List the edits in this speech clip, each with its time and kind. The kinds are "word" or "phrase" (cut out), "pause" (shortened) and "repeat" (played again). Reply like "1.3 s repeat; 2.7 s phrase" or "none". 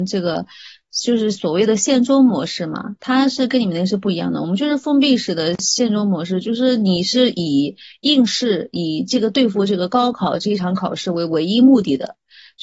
none